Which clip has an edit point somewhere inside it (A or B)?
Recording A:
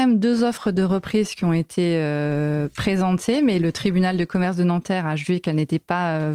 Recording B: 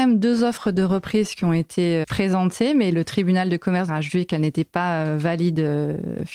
B